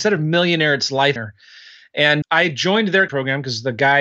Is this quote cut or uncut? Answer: cut